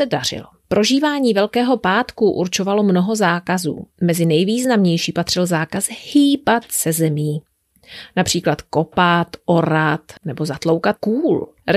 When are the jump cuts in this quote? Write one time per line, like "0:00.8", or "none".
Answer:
0:03.9
0:10.2